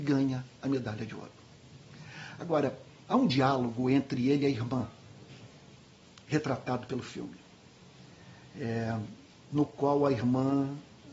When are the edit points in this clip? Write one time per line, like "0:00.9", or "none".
none